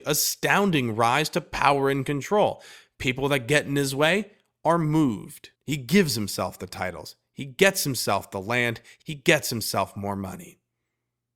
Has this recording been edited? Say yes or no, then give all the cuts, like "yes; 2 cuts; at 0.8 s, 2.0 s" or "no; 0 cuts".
yes; 1 cut; at 5.6 s